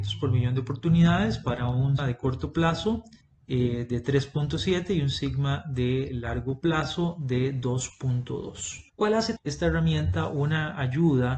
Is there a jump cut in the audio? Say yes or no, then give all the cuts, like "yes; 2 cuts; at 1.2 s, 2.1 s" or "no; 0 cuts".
yes; 4 cuts; at 2.0 s, 3.2 s, 8.9 s, 9.4 s